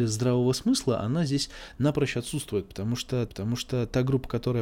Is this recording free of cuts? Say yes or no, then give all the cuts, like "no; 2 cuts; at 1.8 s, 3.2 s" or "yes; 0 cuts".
no; 1 cut; at 3.3 s